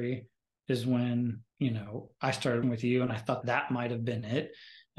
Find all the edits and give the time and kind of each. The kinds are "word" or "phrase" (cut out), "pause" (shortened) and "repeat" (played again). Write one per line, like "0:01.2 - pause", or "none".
0:01.5 - pause
0:02.6 - word
0:03.4 - word

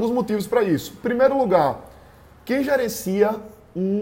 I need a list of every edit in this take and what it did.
none

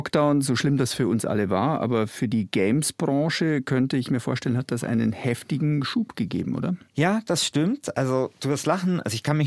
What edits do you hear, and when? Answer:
0:06.9 - pause

